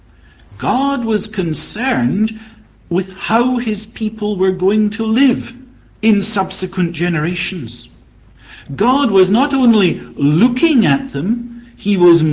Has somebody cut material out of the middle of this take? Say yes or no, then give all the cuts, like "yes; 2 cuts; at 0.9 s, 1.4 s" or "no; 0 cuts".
no; 0 cuts